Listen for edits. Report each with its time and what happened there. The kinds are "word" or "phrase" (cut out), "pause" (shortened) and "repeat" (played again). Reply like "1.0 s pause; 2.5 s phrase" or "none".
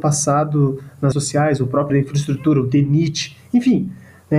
1.1 s word; 1.9 s word